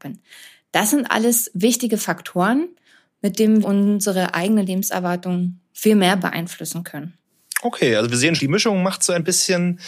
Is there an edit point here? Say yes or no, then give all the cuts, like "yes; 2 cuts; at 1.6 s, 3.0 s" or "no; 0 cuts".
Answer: yes; 2 cuts; at 3.6 s, 8.4 s